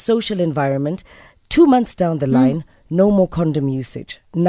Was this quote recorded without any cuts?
yes; 0 cuts

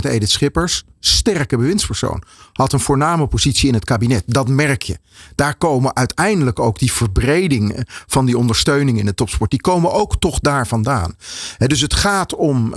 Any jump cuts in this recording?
no; 0 cuts

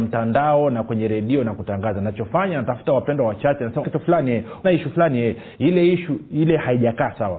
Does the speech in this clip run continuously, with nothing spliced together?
no; 2 cuts; at 3.8 s, 4.6 s

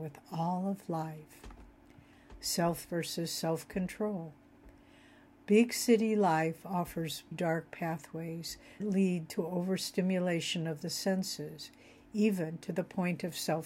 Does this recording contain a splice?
yes; 3 cuts; at 2.8 s, 7.3 s, 8.8 s

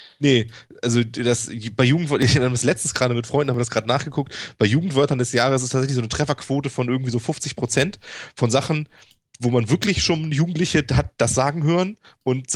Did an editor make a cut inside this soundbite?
no; 0 cuts

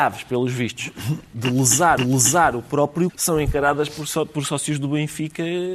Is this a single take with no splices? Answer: no; 2 cuts; at 2.0 s, 3.1 s

